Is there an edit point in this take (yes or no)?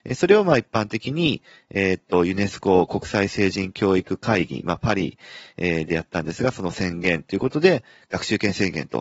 no